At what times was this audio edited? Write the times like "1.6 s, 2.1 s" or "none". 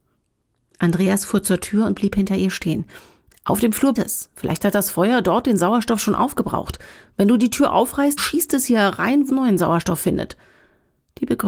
4.0 s, 8.2 s, 9.3 s